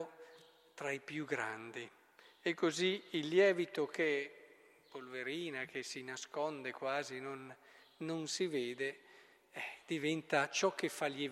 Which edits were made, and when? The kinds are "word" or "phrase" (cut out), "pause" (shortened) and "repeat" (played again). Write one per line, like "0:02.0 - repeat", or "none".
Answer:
none